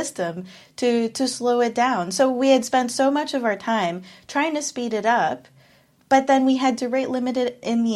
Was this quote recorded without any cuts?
yes; 0 cuts

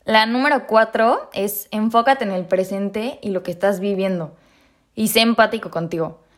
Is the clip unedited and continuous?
yes; 0 cuts

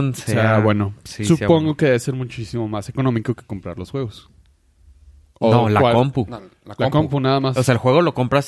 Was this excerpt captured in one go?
yes; 0 cuts

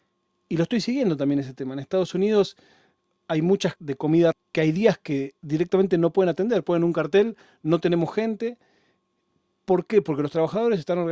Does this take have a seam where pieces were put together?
yes; 2 cuts; at 3.8 s, 4.3 s

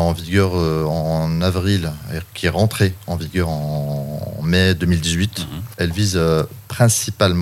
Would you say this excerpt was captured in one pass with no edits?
yes; 0 cuts

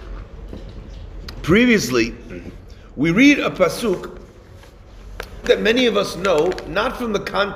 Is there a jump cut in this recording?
yes; 1 cut; at 5.4 s

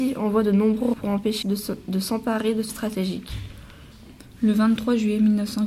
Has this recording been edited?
yes; 3 cuts; at 0.9 s, 1.4 s, 2.7 s

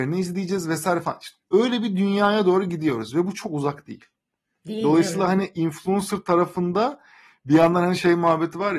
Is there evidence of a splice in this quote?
no; 0 cuts

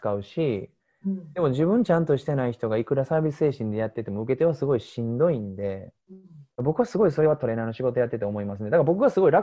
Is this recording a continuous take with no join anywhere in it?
no; 2 cuts; at 6.0 s, 6.5 s

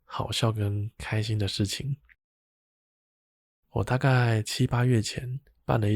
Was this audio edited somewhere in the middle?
no; 0 cuts

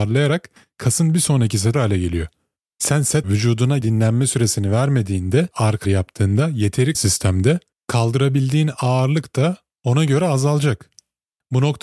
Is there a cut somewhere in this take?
yes; 6 cuts; at 1.7 s, 3.2 s, 3.8 s, 5.5 s, 5.8 s, 6.9 s

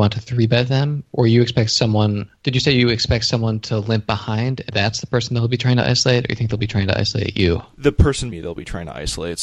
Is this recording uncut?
no; 3 cuts; at 2.4 s, 4.7 s, 8.3 s

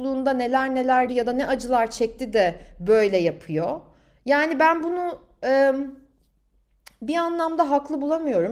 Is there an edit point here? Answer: yes; 1 cut; at 1.1 s

